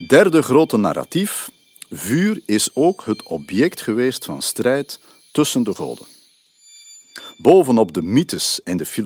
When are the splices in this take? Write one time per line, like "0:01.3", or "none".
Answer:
none